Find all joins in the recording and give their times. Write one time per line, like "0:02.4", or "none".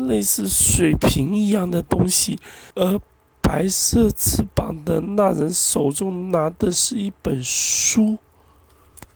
0:02.7